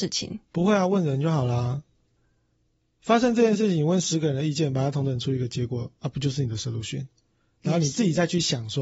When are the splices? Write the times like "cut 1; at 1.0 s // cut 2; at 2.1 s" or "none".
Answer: none